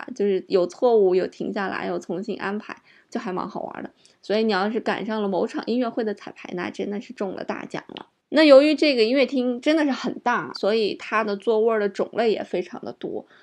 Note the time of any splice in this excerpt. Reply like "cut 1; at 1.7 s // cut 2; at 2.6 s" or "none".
cut 1; at 10.5 s